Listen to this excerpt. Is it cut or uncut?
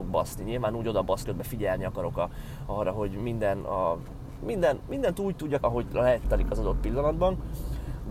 cut